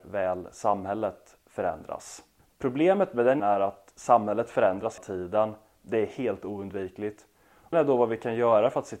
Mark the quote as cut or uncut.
cut